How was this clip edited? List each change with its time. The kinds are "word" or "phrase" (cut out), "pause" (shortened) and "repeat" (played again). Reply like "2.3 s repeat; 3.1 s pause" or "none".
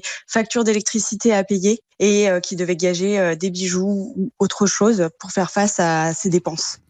none